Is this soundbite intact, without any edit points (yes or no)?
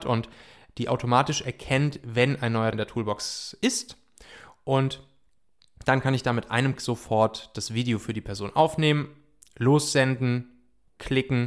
no